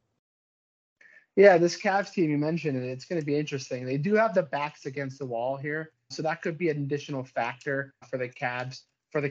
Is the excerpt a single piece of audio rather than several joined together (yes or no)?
no